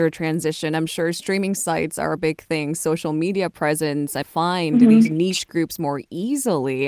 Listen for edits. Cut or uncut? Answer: cut